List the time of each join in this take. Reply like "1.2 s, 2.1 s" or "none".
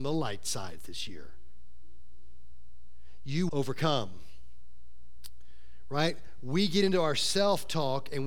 3.5 s